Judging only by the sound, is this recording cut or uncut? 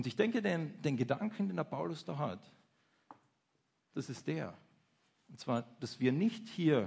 uncut